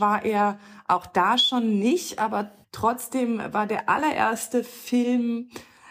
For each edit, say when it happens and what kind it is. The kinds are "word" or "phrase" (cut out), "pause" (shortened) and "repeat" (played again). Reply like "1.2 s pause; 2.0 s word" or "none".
2.6 s pause